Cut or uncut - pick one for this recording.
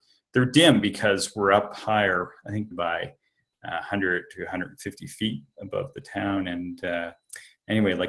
cut